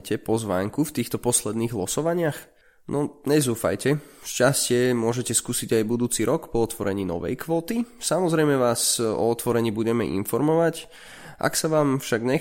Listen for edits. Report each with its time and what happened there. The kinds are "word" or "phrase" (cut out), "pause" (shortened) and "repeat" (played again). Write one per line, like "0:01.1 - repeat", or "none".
0:02.6 - pause